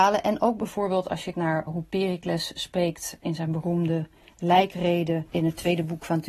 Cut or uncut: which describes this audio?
cut